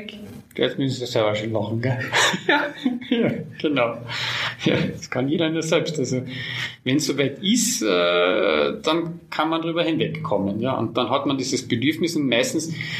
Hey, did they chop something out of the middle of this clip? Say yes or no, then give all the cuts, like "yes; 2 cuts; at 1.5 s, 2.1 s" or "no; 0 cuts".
no; 0 cuts